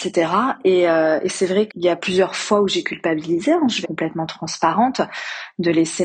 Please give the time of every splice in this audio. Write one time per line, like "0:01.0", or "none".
0:01.7
0:03.8